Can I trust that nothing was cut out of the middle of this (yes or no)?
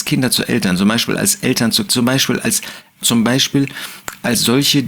no